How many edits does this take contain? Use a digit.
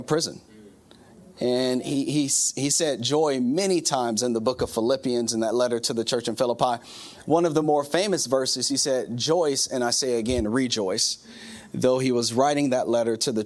0